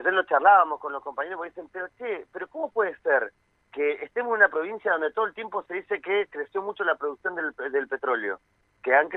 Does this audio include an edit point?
no; 0 cuts

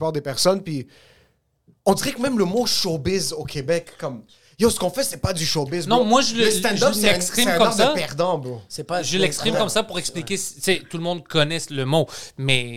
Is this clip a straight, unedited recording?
yes; 0 cuts

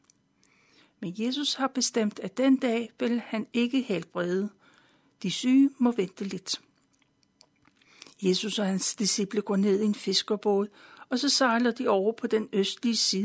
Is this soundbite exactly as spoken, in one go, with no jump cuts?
yes; 0 cuts

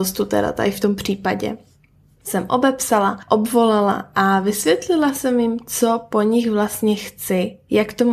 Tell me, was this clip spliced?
no; 0 cuts

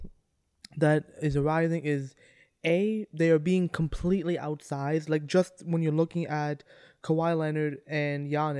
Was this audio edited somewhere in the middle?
no; 0 cuts

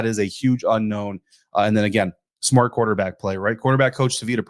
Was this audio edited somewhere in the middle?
no; 0 cuts

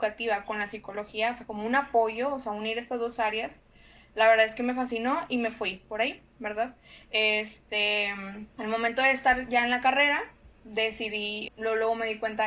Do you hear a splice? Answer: yes; 2 cuts; at 8.5 s, 11.5 s

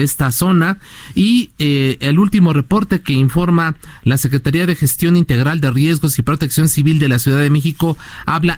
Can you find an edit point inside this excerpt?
no; 0 cuts

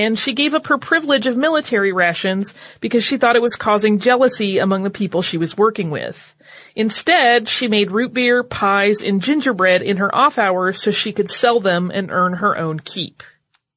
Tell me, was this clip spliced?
no; 0 cuts

